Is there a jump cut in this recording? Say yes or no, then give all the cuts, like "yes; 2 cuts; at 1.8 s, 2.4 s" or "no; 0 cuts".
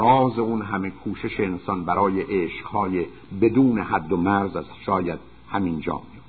no; 0 cuts